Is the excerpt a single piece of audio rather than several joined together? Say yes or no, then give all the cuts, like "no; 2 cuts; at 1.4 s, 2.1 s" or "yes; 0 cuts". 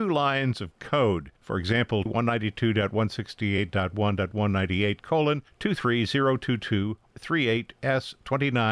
no; 3 cuts; at 1.4 s, 2.1 s, 7.1 s